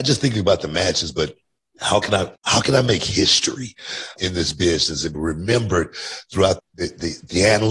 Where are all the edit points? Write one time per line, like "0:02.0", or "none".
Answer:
0:01.6
0:02.4
0:04.2
0:05.1
0:06.6